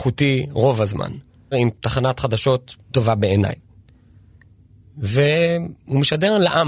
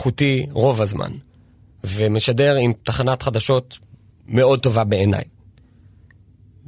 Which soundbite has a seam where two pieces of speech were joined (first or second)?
first